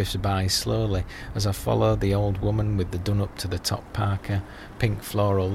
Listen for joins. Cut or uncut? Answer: uncut